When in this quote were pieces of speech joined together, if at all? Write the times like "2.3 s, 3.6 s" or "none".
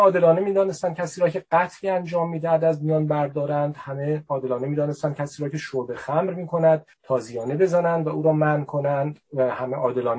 6.9 s